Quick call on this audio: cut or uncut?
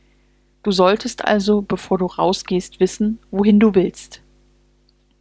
uncut